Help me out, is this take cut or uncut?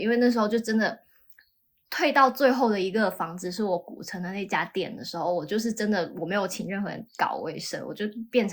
uncut